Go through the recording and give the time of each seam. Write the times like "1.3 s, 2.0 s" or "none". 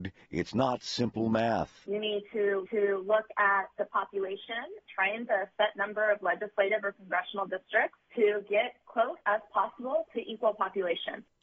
2.7 s, 4.9 s, 5.3 s, 9.2 s